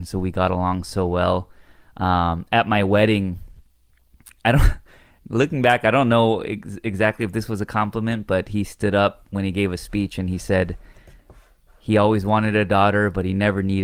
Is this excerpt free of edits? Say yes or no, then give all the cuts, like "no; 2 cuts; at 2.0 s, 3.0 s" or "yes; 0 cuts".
yes; 0 cuts